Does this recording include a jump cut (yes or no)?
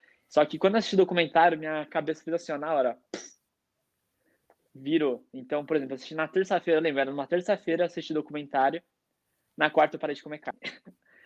no